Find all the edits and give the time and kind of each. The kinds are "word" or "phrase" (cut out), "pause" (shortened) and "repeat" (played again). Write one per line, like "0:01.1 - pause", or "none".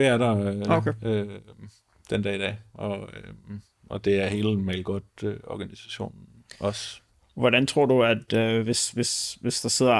none